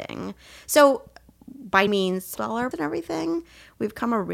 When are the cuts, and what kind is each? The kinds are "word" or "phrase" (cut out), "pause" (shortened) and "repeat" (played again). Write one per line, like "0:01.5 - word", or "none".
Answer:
0:01.9 - word
0:02.4 - phrase
0:02.7 - word